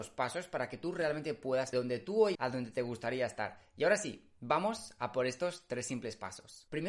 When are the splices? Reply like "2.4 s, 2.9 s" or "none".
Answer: 1.7 s, 2.3 s